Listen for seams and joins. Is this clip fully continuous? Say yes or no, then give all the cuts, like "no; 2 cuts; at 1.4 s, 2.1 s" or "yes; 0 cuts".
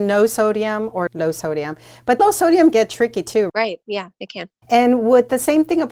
no; 4 cuts; at 1.1 s, 2.2 s, 2.7 s, 3.5 s